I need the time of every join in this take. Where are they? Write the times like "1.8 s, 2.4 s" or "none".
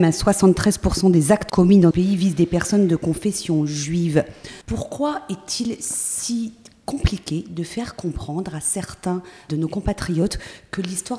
1.5 s, 1.9 s, 4.6 s, 9.5 s